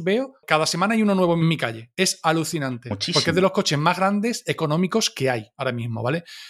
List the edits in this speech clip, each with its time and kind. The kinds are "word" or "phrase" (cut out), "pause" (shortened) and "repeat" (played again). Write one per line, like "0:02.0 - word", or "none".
0:01.4 - phrase

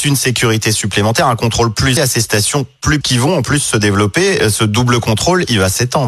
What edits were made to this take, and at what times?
0:02.0 - word
0:03.0 - word

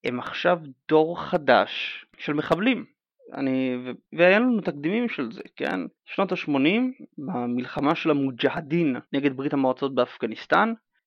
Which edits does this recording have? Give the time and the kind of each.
0:02.1 - pause
0:04.1 - pause
0:06.0 - pause
0:09.1 - pause

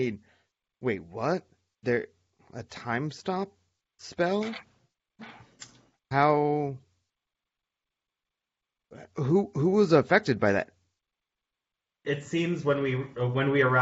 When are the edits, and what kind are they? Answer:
none

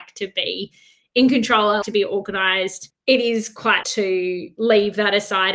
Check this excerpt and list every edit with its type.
0:01.8 - word
0:03.8 - word

